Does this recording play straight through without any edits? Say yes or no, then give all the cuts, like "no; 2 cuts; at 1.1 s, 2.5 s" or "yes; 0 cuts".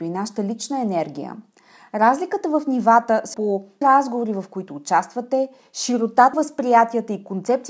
no; 3 cuts; at 3.3 s, 3.8 s, 6.3 s